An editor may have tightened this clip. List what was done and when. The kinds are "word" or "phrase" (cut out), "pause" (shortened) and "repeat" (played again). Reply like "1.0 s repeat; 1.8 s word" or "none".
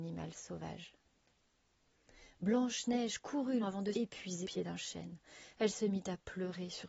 3.6 s word; 3.9 s word; 4.4 s word